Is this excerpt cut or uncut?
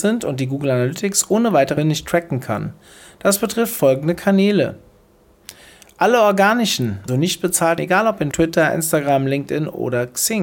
cut